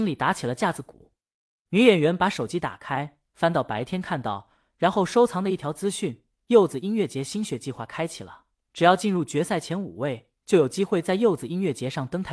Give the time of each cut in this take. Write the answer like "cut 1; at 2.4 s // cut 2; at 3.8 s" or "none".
none